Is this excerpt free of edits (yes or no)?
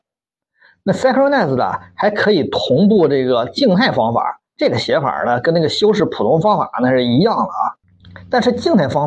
no